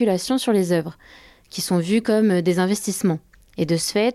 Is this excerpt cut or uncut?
uncut